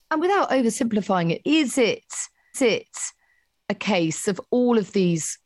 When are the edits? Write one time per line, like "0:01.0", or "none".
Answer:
0:01.4
0:02.5